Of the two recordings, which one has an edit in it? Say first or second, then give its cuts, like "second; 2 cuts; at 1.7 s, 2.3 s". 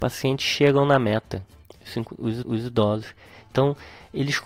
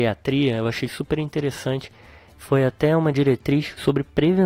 first; 1 cut; at 2.4 s